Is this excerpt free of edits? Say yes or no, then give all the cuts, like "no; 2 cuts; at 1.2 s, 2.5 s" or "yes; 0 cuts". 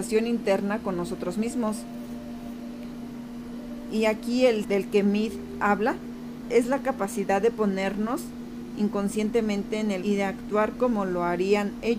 no; 3 cuts; at 4.6 s, 6.4 s, 10.0 s